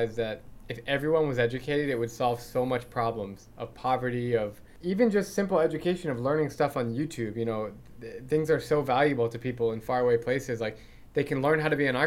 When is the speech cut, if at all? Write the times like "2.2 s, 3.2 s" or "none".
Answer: none